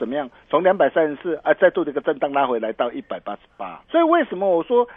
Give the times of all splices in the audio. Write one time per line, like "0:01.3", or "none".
0:03.8